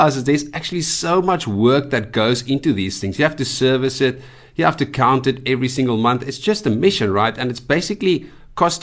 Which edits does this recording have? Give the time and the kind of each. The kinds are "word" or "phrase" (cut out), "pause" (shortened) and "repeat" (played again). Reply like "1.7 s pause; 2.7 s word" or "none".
none